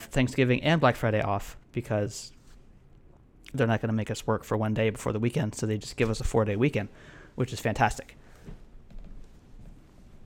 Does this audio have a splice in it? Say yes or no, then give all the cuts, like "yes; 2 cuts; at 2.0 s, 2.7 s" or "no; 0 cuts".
no; 0 cuts